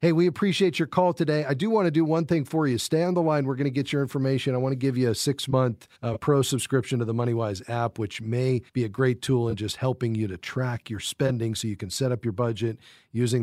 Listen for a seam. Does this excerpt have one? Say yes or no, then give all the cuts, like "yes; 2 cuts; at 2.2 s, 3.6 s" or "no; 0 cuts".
yes; 2 cuts; at 5.9 s, 8.7 s